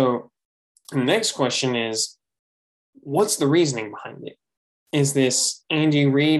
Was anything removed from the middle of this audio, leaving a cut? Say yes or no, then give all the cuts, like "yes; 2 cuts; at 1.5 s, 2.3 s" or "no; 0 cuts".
no; 0 cuts